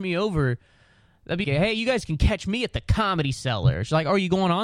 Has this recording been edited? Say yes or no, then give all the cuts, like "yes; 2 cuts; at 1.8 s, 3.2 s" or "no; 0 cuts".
yes; 1 cut; at 1.4 s